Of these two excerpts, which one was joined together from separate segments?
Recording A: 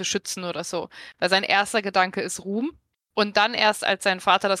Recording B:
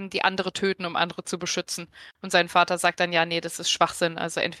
A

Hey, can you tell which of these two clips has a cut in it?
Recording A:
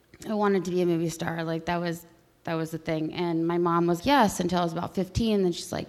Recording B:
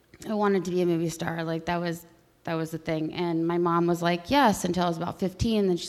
A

